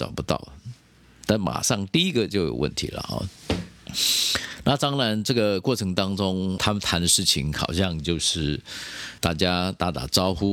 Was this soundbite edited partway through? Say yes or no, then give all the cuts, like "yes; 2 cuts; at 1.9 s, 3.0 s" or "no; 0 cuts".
yes; 3 cuts; at 3.4 s, 6.6 s, 9.2 s